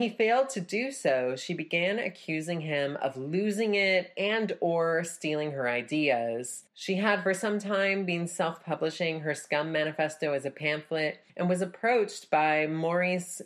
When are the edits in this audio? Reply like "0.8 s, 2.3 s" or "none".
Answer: 6.7 s, 11.3 s

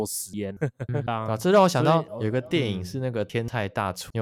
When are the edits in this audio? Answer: 1.1 s

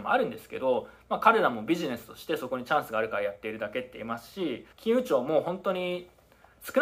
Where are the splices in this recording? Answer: 4.7 s

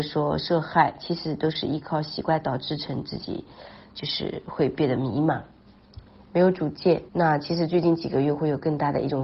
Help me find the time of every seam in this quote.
7.1 s

